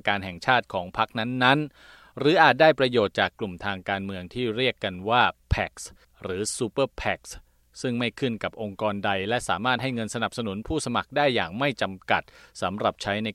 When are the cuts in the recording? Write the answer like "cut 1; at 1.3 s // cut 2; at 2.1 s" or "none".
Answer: none